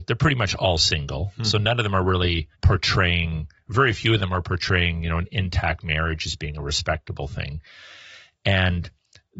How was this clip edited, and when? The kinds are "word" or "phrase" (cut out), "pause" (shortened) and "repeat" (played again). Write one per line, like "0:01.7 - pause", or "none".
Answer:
0:02.5 - pause